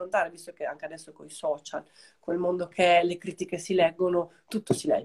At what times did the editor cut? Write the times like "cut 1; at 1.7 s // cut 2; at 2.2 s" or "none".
none